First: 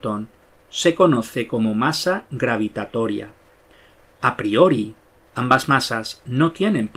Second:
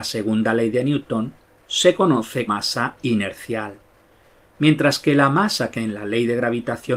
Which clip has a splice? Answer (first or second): second